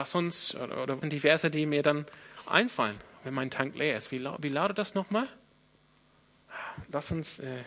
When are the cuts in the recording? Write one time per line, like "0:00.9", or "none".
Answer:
0:01.0